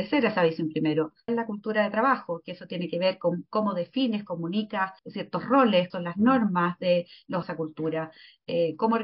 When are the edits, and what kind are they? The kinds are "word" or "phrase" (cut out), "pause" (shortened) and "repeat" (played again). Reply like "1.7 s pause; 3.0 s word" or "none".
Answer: 1.3 s word; 5.0 s pause; 5.9 s word; 7.4 s phrase